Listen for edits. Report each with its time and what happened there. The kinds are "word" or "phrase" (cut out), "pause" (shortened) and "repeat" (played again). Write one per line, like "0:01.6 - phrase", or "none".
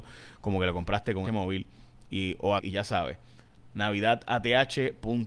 0:01.2 - word
0:02.6 - word